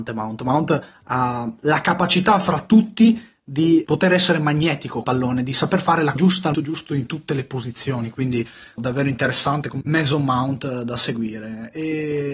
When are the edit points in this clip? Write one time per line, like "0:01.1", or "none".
0:03.8
0:05.0
0:06.2
0:06.5
0:08.8
0:09.8